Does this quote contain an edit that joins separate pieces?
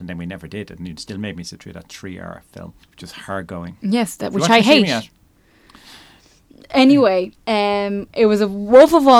yes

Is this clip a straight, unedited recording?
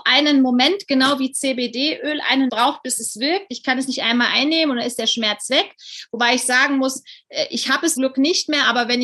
no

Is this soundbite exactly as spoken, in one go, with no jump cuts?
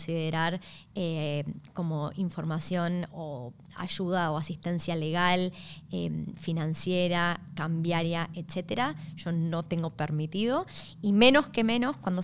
no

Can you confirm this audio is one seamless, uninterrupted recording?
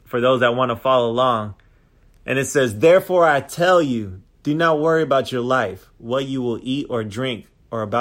yes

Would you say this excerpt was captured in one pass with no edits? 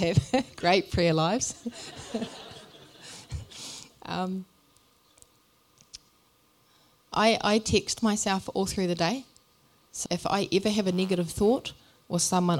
no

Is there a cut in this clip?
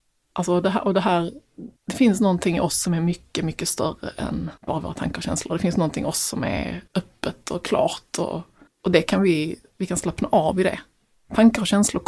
yes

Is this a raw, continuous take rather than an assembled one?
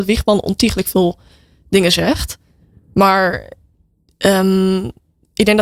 yes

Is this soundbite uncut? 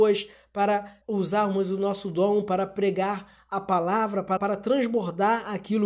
no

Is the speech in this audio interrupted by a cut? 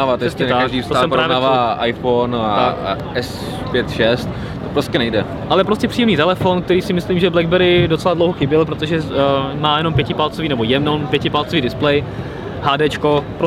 no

